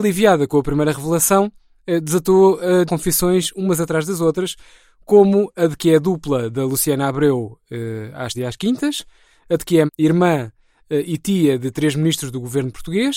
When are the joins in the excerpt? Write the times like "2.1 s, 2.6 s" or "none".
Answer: 2.9 s, 8.3 s, 9.9 s